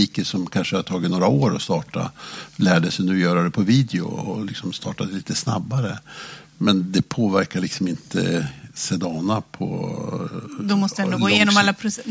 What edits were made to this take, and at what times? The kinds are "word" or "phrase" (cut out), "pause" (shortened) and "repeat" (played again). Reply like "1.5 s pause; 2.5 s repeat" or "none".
none